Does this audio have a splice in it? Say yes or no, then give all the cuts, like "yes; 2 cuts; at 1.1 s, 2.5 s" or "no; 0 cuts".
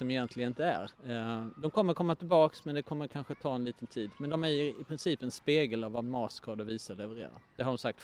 yes; 1 cut; at 0.9 s